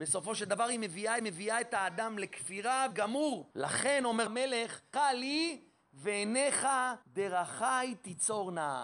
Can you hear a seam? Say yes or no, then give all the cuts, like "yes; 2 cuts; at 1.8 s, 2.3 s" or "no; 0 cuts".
yes; 6 cuts; at 1.2 s, 2.9 s, 3.5 s, 4.3 s, 4.9 s, 7.0 s